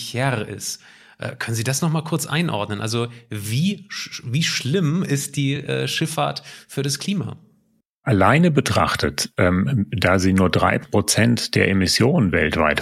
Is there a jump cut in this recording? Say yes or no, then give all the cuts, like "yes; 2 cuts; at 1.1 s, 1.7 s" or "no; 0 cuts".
no; 0 cuts